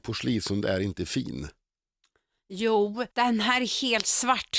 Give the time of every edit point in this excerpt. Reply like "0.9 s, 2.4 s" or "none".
3.1 s